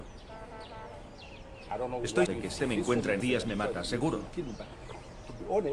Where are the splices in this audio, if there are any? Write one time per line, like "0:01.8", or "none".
0:02.3
0:02.6
0:03.2